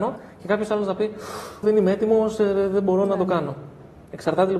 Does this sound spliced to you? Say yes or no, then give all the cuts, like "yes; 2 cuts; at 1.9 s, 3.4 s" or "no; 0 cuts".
yes; 1 cut; at 1.6 s